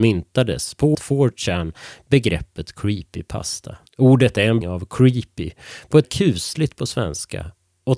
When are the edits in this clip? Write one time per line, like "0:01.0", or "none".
0:00.9
0:03.9
0:04.6
0:06.0